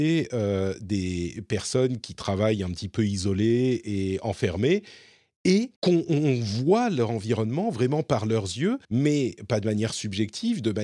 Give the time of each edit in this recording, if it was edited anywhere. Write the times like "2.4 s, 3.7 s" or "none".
5.8 s, 8.8 s